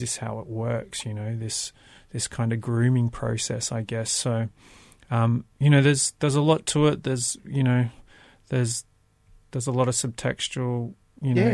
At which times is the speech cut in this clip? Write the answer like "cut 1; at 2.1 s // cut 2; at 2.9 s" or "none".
none